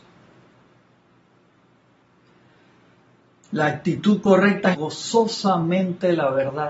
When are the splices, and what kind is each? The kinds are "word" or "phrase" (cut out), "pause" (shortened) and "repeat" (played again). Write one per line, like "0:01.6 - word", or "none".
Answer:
0:04.7 - phrase